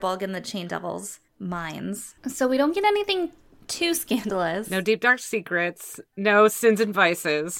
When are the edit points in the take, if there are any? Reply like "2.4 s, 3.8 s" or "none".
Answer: 2.2 s